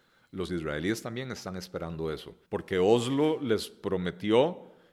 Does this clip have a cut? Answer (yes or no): yes